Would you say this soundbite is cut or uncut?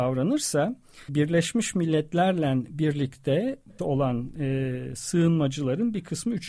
cut